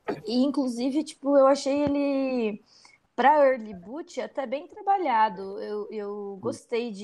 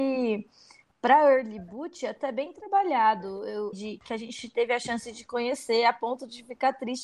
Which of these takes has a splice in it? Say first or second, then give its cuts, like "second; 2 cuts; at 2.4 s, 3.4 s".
second; 1 cut; at 3.7 s